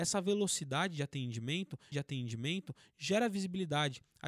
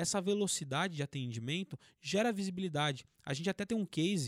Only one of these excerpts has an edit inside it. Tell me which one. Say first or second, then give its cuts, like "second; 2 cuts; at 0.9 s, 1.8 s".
first; 1 cut; at 1.9 s